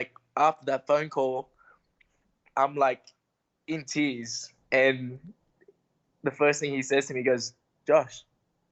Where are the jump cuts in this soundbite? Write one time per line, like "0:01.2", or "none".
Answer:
none